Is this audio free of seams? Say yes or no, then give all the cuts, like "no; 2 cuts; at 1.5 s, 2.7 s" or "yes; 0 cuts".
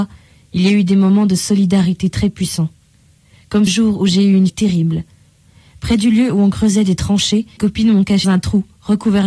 no; 4 cuts; at 3.7 s, 4.5 s, 7.6 s, 8.2 s